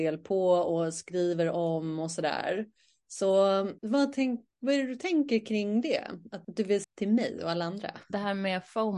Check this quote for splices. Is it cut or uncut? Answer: cut